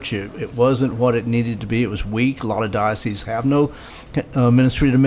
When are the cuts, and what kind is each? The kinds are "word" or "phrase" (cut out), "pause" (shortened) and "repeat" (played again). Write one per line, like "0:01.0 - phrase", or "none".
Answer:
none